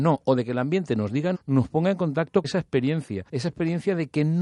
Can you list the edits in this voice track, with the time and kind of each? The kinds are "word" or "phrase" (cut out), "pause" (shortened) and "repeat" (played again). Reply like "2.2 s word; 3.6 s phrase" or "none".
1.3 s word; 2.4 s word; 3.3 s pause

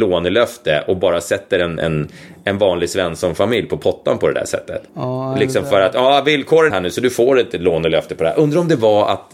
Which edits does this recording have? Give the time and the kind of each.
1.8 s word; 4.9 s pause; 6.7 s phrase

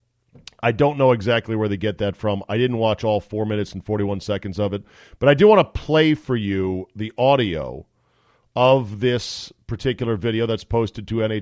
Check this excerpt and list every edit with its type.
none

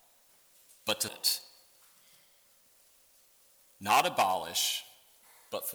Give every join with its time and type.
1.1 s word

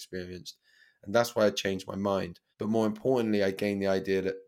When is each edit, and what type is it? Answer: 2.5 s pause

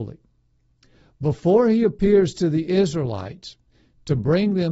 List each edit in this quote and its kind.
none

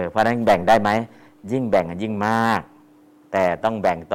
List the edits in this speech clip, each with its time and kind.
none

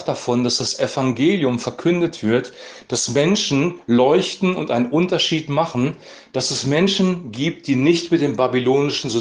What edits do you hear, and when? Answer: none

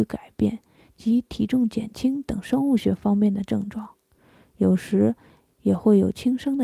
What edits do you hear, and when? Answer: none

